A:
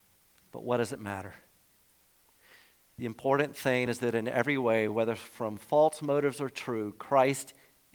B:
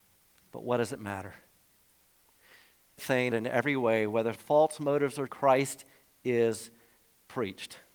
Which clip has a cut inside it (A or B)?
B